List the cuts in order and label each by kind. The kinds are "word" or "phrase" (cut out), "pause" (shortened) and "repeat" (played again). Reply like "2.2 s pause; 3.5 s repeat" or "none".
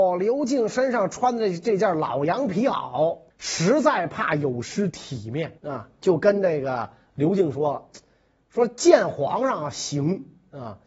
3.3 s pause; 5.6 s pause; 7.0 s pause